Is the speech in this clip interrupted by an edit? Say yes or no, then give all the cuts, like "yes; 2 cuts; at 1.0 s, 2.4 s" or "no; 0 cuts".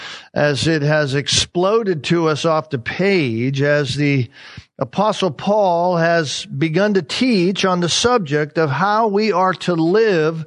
no; 0 cuts